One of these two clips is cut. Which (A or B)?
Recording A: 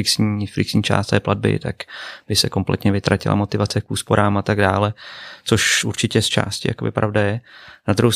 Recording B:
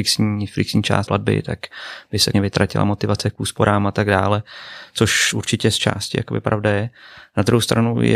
B